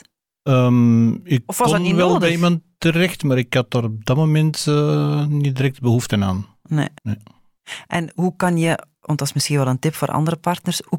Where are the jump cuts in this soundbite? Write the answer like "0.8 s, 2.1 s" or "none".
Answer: 7.0 s